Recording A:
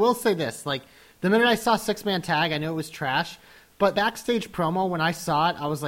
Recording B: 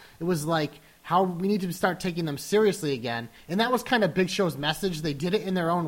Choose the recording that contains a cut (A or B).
A